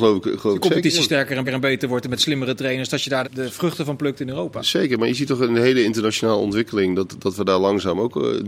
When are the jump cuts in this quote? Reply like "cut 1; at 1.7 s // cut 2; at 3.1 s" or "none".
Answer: cut 1; at 1.4 s // cut 2; at 3.2 s